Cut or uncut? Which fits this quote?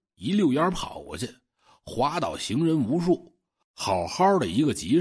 uncut